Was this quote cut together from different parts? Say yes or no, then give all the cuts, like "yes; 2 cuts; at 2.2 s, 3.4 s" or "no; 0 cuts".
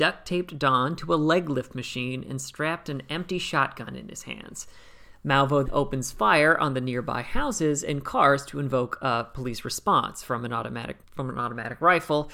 yes; 2 cuts; at 5.7 s, 11.0 s